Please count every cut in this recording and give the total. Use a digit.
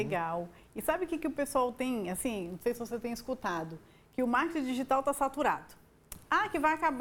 0